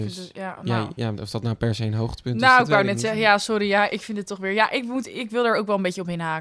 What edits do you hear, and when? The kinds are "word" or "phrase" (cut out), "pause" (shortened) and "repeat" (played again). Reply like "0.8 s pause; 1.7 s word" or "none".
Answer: none